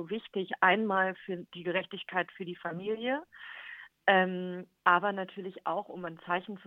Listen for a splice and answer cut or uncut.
uncut